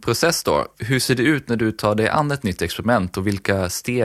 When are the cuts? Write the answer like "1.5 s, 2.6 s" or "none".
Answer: none